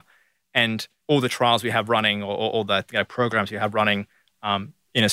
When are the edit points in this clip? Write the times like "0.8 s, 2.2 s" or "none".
1.0 s